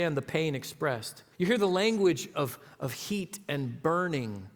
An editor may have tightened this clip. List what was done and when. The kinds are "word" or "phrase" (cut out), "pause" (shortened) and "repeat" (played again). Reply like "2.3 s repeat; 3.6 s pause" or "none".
1.3 s pause